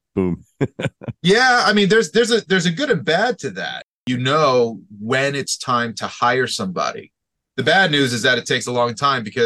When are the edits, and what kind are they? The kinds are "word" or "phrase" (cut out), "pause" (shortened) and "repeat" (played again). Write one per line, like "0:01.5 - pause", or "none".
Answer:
none